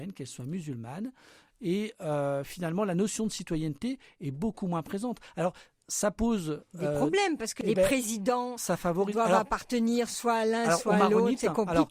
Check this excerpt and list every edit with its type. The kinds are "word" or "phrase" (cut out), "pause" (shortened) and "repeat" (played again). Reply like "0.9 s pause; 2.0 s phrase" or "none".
none